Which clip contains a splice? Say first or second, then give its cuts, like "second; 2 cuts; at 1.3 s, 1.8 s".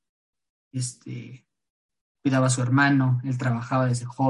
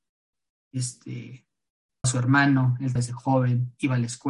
second; 2 cuts; at 2.0 s, 3.0 s